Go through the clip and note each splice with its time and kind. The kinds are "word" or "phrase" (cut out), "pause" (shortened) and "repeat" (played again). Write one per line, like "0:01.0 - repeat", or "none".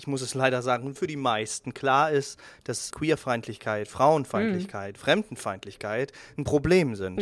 0:01.0 - word
0:02.9 - word